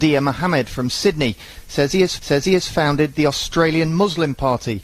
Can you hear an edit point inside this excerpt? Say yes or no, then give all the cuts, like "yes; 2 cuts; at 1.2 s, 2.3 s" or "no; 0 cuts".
yes; 1 cut; at 2.2 s